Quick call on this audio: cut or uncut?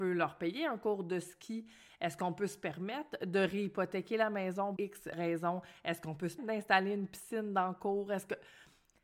cut